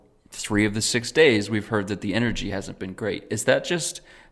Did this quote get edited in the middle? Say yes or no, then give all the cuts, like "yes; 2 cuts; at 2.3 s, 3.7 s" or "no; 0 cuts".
no; 0 cuts